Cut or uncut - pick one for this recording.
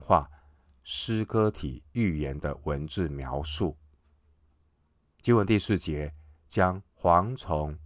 cut